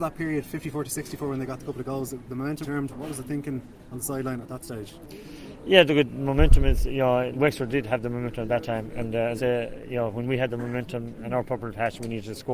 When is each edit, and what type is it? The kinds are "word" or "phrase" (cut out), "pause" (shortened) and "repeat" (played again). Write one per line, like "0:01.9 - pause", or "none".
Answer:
0:02.6 - word
0:07.3 - word
0:09.4 - word

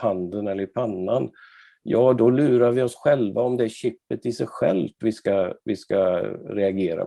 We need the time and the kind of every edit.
none

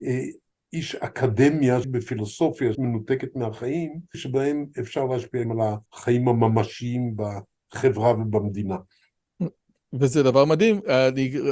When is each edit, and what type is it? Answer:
0:01.8 - word
0:02.7 - word
0:04.1 - phrase
0:05.4 - word
0:05.9 - pause

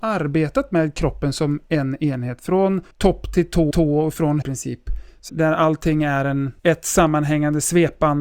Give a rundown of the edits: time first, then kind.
0:02.9 - pause
0:03.7 - repeat
0:04.4 - phrase
0:05.3 - word
0:06.6 - pause

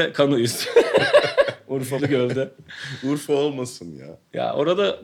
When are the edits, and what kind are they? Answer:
0:02.0 - word

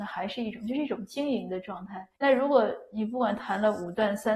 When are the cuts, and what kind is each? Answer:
0:02.2 - pause

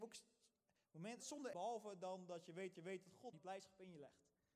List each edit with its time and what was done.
0:01.2 - phrase
0:01.5 - phrase
0:02.7 - repeat
0:03.3 - word

